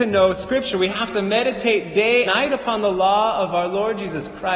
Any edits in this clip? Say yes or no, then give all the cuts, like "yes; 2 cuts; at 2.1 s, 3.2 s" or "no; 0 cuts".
yes; 1 cut; at 2.2 s